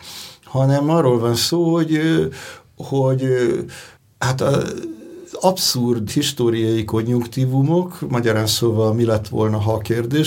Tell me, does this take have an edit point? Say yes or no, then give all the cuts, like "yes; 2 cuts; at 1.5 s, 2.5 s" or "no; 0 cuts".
yes; 2 cuts; at 4.0 s, 6.1 s